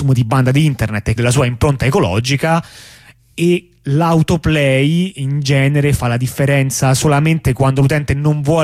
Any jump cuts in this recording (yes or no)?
yes